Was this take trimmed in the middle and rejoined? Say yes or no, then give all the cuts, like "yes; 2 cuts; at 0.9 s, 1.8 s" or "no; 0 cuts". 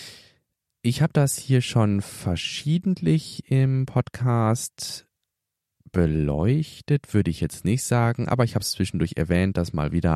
no; 0 cuts